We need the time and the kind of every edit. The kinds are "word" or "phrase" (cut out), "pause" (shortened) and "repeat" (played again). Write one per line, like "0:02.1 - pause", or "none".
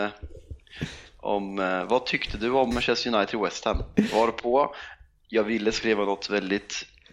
0:02.7 - word